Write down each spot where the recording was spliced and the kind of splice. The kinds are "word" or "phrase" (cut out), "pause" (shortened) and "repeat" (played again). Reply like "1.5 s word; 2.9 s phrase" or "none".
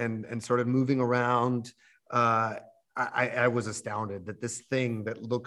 none